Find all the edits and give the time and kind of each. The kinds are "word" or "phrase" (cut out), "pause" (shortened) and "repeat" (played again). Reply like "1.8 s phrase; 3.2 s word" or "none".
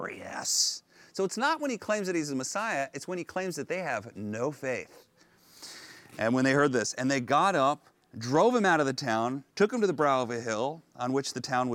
none